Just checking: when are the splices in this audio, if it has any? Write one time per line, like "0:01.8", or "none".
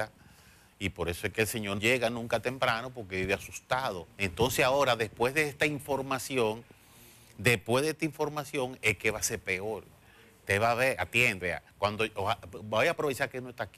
0:01.8
0:11.4